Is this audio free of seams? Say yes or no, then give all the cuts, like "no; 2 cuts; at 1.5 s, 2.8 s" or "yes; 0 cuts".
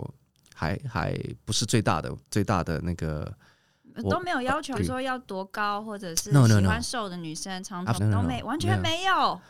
no; 3 cuts; at 2.2 s, 4.7 s, 7.9 s